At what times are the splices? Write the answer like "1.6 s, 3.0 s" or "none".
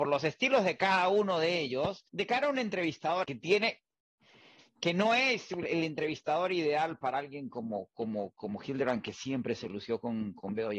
2.1 s, 3.2 s